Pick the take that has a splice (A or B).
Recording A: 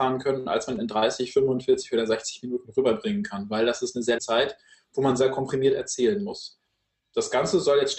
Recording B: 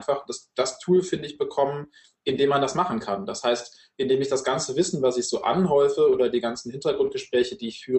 A